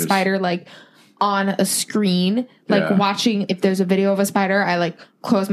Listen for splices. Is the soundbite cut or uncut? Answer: cut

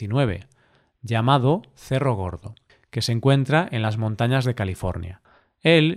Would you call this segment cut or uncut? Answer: uncut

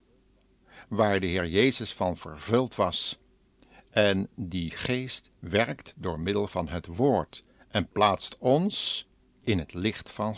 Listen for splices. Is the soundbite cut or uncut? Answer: uncut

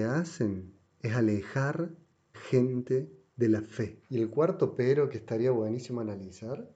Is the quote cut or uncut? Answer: cut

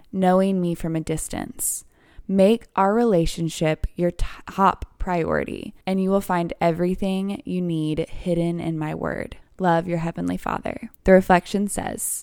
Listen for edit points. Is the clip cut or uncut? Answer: cut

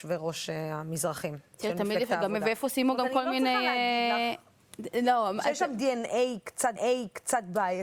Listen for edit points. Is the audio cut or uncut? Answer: cut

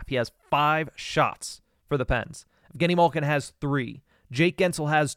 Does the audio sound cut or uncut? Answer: uncut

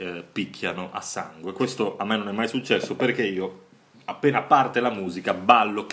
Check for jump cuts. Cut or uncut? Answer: uncut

